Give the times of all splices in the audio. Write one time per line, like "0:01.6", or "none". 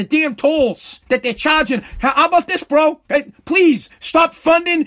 0:01.0
0:03.0